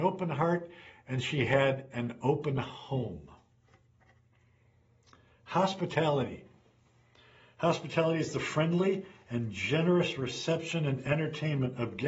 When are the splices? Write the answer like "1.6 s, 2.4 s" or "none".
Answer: none